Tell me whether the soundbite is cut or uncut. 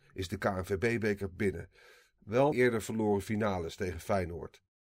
cut